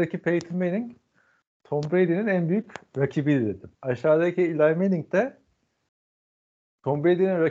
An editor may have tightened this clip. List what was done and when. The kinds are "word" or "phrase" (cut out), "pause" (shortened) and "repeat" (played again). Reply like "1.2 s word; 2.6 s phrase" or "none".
3.7 s pause